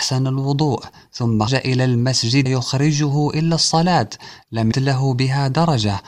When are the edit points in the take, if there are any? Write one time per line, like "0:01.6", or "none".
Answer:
0:01.5
0:02.5
0:04.7